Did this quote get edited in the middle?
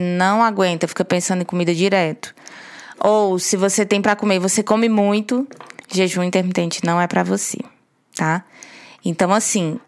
yes; 1 cut; at 4.0 s

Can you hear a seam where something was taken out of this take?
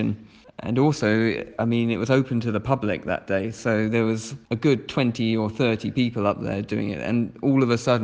yes; 1 cut; at 4.4 s

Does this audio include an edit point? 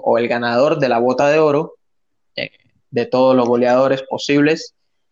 no; 0 cuts

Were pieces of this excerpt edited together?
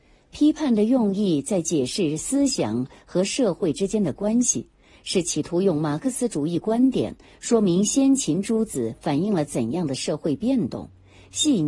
no; 0 cuts

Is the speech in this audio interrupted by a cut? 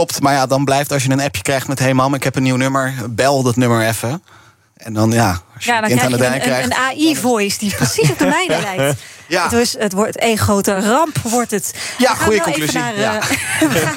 no; 0 cuts

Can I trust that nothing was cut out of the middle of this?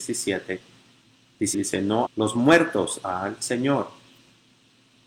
no; 2 cuts; at 1.5 s, 2.0 s

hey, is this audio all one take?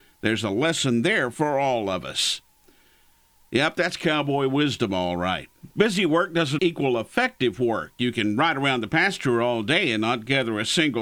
no; 2 cuts; at 5.7 s, 6.6 s

